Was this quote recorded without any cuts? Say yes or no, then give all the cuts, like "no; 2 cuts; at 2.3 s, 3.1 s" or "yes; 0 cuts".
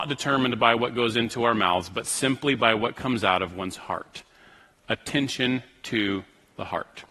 yes; 0 cuts